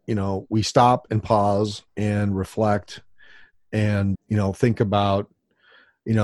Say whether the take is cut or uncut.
cut